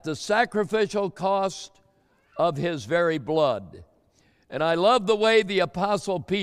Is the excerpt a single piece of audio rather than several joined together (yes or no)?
yes